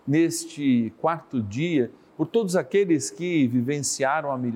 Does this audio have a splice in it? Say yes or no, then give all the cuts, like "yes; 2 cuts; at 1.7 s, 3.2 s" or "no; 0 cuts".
no; 0 cuts